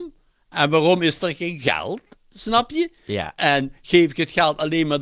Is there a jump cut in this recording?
no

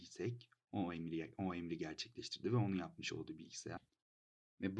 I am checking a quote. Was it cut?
no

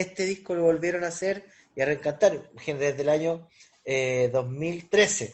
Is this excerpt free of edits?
yes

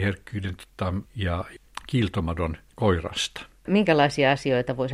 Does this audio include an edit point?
yes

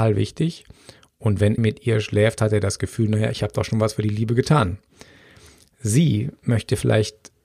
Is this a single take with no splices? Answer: no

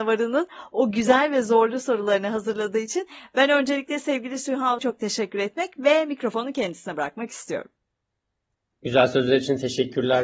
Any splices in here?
yes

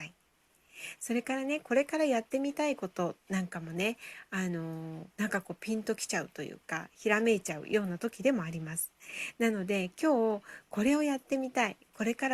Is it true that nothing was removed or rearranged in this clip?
no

